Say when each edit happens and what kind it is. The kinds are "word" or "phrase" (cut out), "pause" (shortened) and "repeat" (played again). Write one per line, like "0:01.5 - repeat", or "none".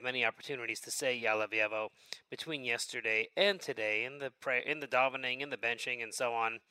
none